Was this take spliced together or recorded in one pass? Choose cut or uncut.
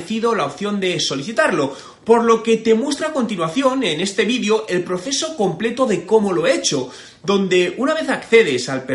uncut